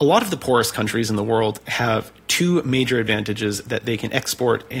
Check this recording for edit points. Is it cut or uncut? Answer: uncut